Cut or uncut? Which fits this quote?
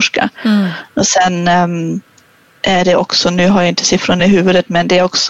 uncut